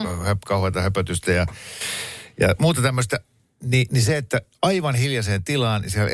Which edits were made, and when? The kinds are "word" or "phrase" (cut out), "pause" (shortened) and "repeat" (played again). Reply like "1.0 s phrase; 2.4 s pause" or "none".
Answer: none

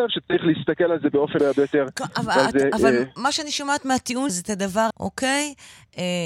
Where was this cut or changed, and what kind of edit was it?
1.4 s word; 4.3 s word; 4.9 s word

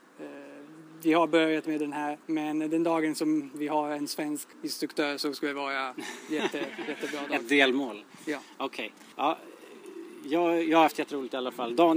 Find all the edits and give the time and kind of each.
2.2 s pause; 4.5 s pause; 9.1 s pause

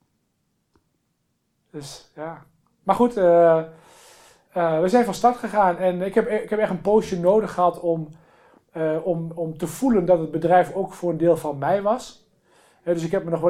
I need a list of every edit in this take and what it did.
none

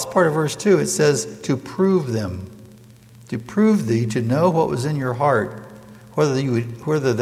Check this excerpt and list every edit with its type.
none

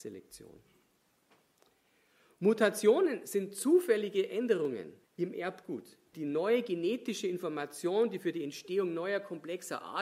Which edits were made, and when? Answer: 5.0 s pause; 6.1 s word

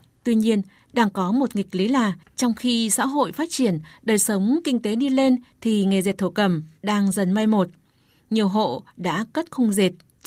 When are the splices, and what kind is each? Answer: none

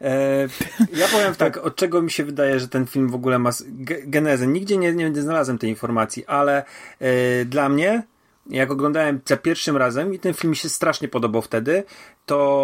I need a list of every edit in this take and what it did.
none

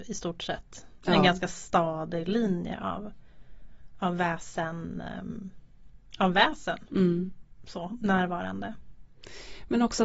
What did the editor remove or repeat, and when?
none

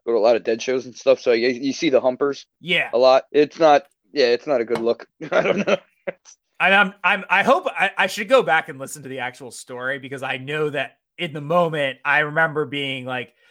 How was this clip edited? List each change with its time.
2.5 s word; 3.3 s pause; 5.1 s pause

